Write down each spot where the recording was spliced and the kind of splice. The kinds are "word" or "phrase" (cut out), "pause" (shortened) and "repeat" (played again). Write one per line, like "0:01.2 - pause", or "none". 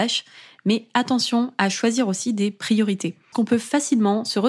0:03.3 - word